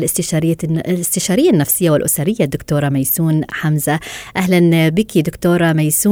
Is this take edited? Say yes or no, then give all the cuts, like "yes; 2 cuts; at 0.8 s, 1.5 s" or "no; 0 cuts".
no; 0 cuts